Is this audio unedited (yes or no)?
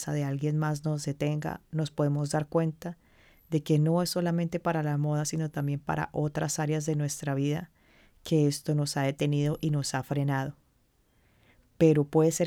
yes